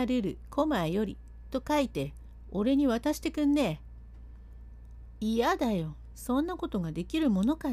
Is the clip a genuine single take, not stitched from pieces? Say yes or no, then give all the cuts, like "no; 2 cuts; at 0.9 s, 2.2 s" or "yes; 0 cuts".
yes; 0 cuts